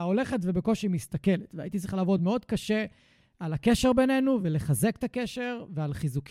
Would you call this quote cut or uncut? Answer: uncut